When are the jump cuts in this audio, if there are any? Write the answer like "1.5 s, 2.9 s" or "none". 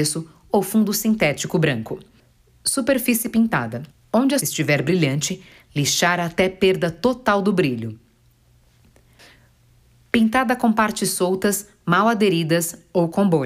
3.9 s, 4.4 s